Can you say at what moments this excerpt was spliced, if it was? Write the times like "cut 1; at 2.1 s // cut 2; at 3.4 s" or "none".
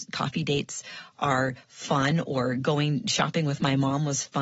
none